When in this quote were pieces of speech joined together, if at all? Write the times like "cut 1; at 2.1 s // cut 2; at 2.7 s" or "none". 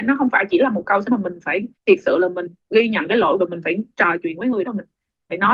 cut 1; at 1.1 s // cut 2; at 1.7 s // cut 3; at 2.6 s // cut 4; at 3.4 s // cut 5; at 4.6 s